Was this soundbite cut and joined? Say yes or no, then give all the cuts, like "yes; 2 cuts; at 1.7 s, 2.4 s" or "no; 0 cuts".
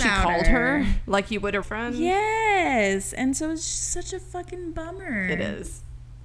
yes; 1 cut; at 1.6 s